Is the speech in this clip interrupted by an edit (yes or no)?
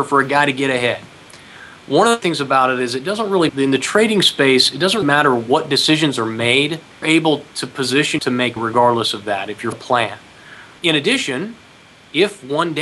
yes